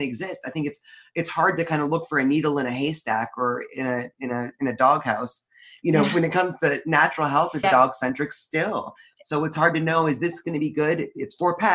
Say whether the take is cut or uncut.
cut